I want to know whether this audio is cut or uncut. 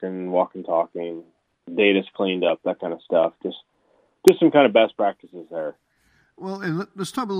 uncut